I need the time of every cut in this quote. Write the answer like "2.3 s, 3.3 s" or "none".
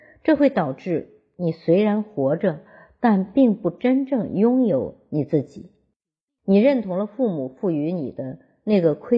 none